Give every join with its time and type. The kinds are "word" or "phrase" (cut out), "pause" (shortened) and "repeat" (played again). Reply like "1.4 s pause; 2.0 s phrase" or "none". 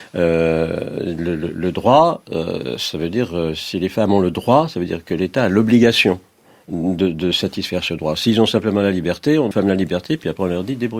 9.5 s phrase